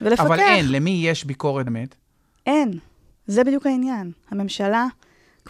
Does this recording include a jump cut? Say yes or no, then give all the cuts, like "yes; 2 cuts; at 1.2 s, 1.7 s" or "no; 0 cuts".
yes; 1 cut; at 1.7 s